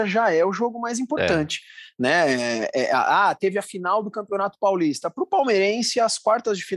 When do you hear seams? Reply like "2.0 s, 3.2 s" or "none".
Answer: none